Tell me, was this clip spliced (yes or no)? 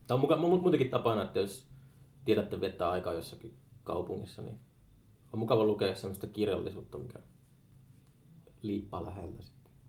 no